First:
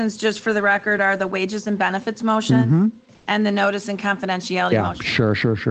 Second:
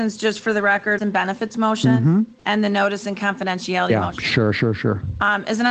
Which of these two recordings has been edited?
second; 2 cuts; at 1.0 s, 2.4 s

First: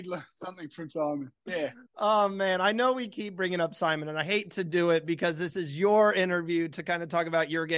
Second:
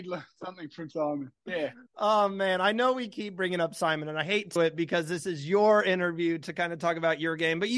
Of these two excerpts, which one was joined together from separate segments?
second; 1 cut; at 4.6 s

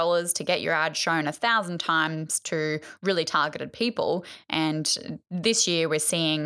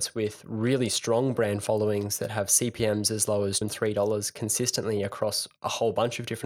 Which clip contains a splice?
second; 1 cut; at 3.6 s

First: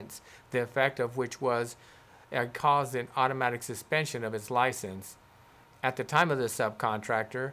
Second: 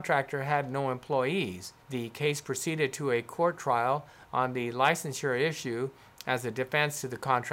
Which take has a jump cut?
second; 1 cut; at 1.8 s

